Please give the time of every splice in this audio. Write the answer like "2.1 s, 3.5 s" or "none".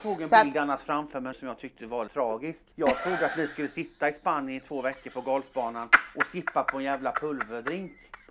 1.3 s, 2.1 s, 2.7 s